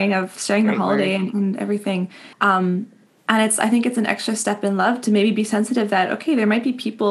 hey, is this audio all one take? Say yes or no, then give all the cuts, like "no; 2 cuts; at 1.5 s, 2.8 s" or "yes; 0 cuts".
no; 1 cut; at 2.3 s